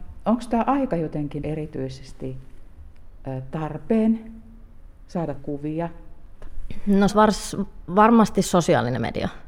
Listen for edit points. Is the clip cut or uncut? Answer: cut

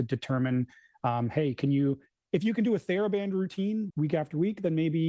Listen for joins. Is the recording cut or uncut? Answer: cut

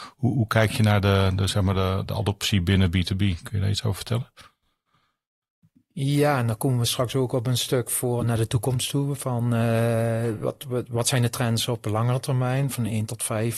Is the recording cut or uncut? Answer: uncut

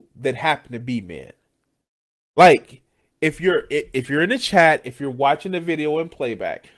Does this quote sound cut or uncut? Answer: uncut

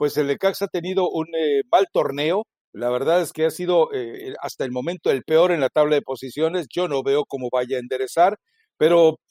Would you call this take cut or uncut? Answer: uncut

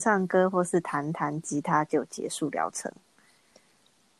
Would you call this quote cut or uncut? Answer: uncut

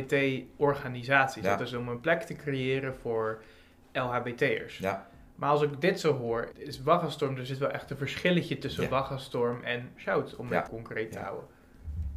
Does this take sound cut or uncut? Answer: cut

